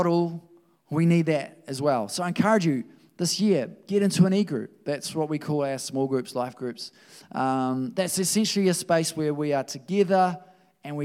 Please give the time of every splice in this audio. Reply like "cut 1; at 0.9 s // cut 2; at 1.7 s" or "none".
none